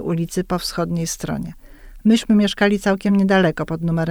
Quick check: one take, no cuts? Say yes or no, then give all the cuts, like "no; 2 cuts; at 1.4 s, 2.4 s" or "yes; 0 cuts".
yes; 0 cuts